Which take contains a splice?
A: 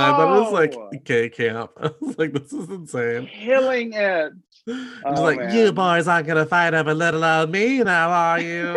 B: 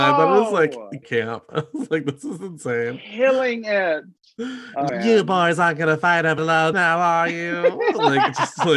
B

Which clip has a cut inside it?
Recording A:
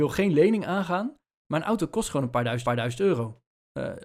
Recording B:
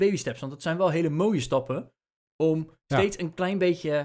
A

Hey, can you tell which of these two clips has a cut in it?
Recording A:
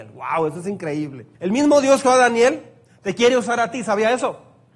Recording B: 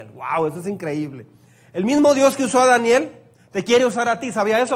A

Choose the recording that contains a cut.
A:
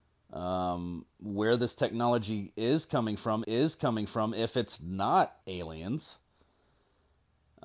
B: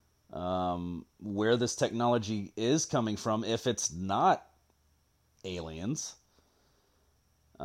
A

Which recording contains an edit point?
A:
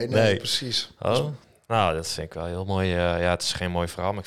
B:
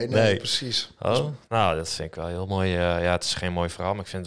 B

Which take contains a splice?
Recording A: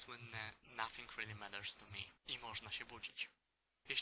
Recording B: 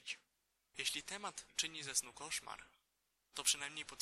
A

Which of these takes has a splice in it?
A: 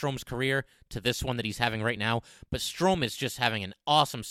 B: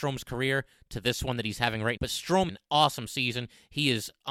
B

